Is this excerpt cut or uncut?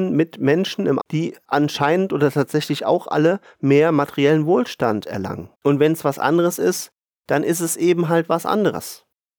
cut